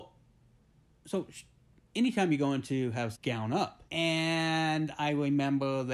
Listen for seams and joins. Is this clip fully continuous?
no; 2 cuts; at 3.1 s, 3.9 s

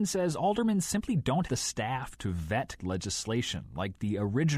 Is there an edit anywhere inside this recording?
yes; 2 cuts; at 1.5 s, 2.8 s

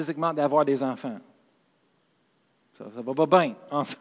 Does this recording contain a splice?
no; 0 cuts

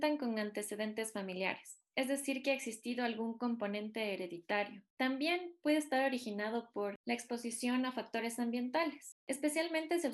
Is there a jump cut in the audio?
yes; 1 cut; at 4.9 s

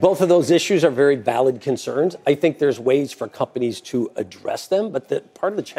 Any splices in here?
no; 0 cuts

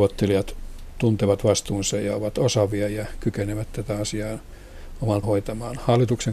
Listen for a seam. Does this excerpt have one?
yes; 1 cut; at 5.2 s

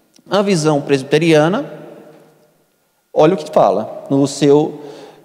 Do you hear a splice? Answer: no; 0 cuts

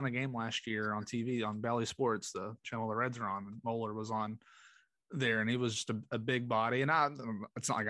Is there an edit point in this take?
no; 0 cuts

